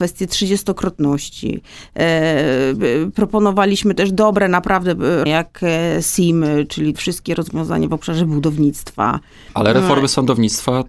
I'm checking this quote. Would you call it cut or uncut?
cut